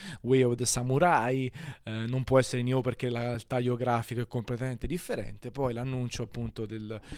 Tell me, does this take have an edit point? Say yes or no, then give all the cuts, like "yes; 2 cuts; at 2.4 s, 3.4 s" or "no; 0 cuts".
no; 0 cuts